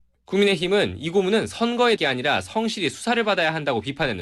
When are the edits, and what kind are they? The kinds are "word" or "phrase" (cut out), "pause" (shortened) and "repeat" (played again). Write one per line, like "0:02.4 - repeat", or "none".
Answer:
0:02.0 - word